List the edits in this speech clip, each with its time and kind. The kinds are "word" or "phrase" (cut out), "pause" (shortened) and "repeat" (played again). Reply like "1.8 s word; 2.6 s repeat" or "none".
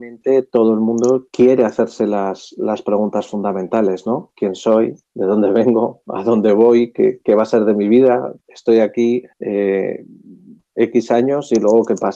1.3 s pause; 5.1 s pause; 8.4 s pause; 9.3 s pause